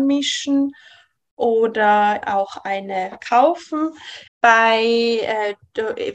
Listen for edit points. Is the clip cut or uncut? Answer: cut